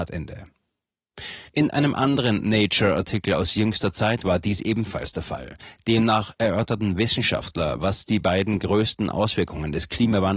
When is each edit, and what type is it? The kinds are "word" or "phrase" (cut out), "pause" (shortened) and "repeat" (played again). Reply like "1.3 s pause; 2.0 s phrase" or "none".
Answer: 1.5 s pause